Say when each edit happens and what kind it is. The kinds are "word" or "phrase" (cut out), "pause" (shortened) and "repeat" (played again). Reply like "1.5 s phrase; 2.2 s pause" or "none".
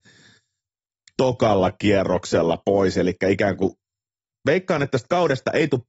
none